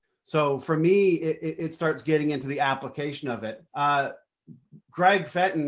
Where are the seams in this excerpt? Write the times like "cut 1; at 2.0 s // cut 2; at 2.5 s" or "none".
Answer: cut 1; at 3.7 s